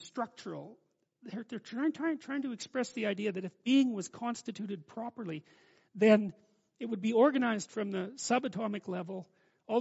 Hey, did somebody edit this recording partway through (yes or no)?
no